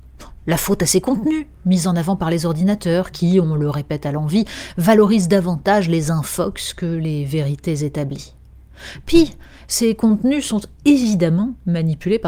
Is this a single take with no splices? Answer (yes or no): yes